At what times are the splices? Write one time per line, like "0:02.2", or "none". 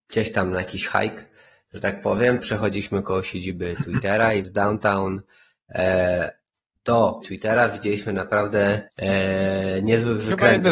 0:02.4
0:04.4
0:07.2
0:08.9